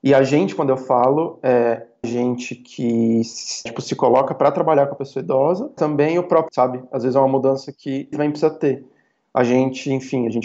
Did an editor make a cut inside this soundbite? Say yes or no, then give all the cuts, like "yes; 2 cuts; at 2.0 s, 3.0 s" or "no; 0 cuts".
yes; 5 cuts; at 2.0 s, 3.7 s, 5.8 s, 6.5 s, 8.1 s